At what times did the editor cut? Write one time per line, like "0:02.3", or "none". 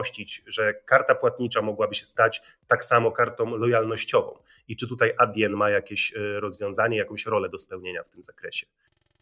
none

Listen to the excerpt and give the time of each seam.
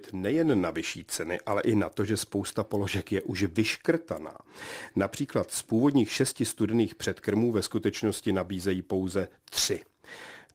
none

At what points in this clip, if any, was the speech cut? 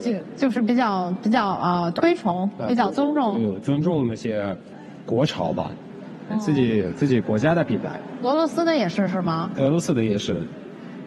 0:06.3

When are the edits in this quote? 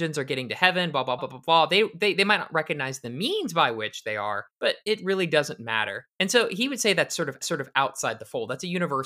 0:01.2
0:04.5
0:06.1
0:07.4

